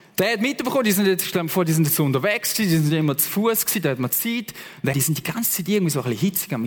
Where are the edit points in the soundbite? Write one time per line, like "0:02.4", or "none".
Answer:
0:04.9